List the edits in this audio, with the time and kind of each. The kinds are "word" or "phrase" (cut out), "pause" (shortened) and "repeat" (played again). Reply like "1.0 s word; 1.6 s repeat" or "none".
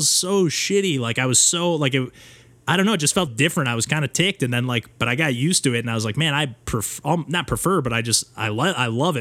3.3 s word